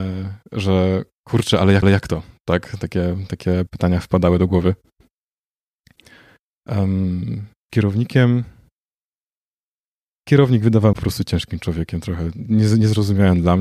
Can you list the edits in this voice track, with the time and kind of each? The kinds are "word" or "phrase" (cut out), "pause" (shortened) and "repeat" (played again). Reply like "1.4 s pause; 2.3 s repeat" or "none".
1.8 s repeat; 3.7 s word; 7.7 s word; 10.9 s phrase